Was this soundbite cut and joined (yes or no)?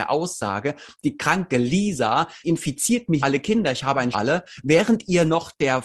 yes